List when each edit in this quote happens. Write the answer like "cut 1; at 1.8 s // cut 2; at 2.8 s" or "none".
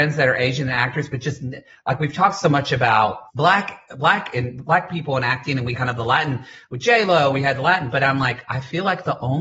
cut 1; at 3.3 s // cut 2; at 5.7 s